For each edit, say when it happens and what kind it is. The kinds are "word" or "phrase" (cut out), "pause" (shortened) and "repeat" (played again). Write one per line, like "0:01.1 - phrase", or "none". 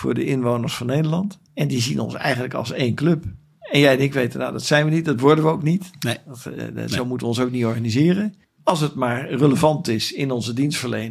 none